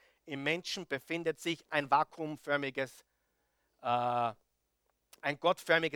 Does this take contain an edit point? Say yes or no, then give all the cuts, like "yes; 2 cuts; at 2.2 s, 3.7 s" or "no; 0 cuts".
no; 0 cuts